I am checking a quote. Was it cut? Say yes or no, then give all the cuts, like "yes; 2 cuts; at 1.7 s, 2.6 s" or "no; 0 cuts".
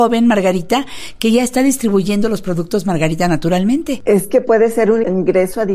no; 0 cuts